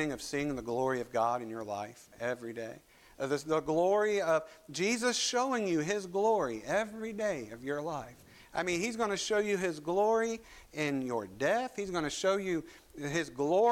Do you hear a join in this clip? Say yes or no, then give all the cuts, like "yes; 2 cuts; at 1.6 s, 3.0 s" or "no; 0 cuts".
no; 0 cuts